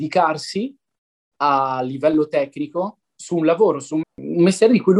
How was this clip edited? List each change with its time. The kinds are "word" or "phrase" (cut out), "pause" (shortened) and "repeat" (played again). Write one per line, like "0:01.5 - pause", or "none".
0:03.0 - pause
0:04.0 - word